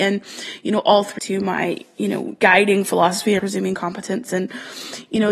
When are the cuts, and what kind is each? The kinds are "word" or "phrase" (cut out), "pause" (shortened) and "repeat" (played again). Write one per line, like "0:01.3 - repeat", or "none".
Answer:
0:01.2 - phrase
0:02.4 - word
0:03.4 - word